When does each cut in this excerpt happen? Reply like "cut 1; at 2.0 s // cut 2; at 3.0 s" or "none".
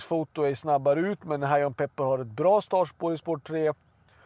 none